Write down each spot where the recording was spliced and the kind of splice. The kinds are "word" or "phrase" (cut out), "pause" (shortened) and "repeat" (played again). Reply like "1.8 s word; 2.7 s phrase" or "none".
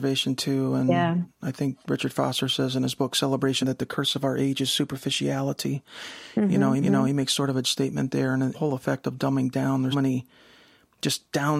1.8 s pause; 3.6 s phrase; 6.8 s repeat; 7.6 s word; 8.5 s phrase; 9.9 s word